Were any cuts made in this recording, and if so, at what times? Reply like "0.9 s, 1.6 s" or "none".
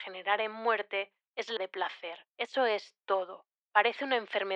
1.6 s, 2.3 s

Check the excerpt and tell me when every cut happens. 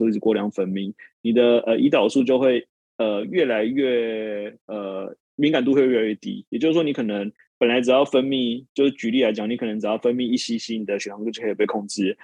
none

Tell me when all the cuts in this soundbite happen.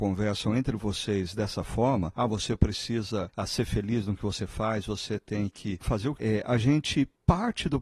6.2 s

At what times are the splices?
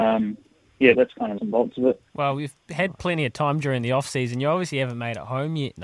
0.9 s, 1.4 s, 2.1 s

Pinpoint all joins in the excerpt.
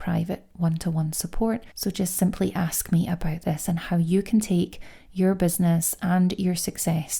1.7 s

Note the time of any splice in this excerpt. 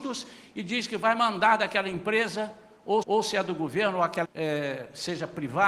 3.0 s, 4.2 s

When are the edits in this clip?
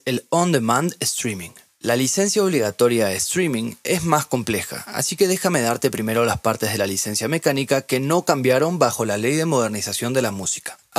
none

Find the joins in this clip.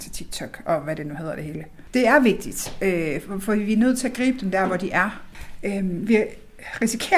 none

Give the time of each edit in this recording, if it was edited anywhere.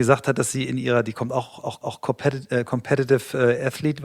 1.8 s

